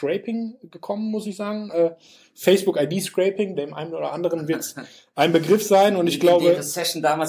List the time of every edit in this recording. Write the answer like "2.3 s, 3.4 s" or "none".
none